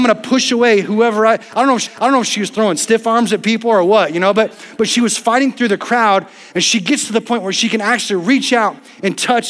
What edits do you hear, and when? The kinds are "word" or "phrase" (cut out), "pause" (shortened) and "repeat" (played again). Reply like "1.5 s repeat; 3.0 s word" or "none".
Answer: 1.8 s repeat